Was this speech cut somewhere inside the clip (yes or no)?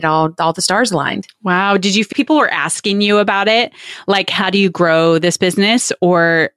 yes